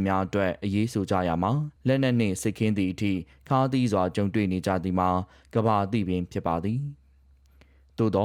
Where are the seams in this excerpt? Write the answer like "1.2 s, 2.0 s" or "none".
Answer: 1.8 s